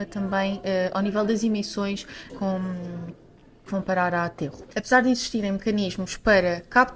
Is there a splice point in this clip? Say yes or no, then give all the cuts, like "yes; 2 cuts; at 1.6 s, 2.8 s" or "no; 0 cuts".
yes; 3 cuts; at 2.3 s, 3.7 s, 4.7 s